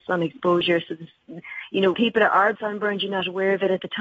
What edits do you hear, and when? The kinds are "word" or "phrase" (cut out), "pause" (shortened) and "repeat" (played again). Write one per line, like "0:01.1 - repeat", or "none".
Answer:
0:01.9 - word
0:02.5 - word